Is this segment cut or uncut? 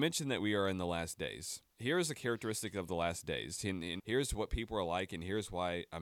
cut